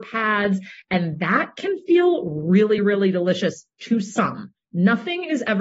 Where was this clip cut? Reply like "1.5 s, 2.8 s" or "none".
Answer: none